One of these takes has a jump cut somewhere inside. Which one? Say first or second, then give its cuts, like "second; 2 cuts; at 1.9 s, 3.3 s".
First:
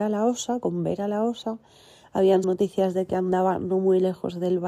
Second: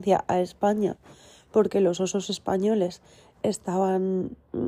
first; 1 cut; at 2.4 s